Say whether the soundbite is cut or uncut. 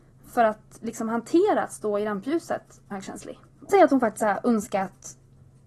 cut